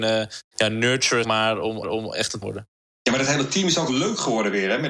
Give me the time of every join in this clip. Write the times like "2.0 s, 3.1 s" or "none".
1.2 s, 1.8 s, 2.4 s, 3.9 s